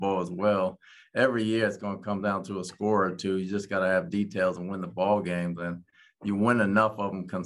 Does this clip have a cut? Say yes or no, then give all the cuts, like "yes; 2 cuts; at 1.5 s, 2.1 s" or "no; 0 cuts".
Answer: no; 0 cuts